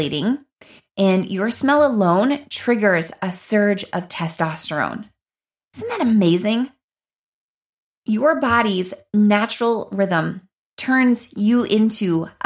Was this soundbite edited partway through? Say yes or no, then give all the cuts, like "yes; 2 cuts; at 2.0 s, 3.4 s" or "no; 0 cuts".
no; 0 cuts